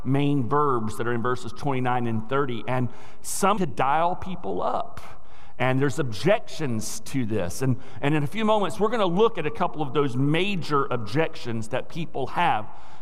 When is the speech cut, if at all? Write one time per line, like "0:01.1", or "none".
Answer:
0:03.6